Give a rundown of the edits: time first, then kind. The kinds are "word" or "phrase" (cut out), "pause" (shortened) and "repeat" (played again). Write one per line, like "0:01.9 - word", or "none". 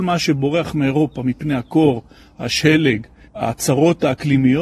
0:03.2 - pause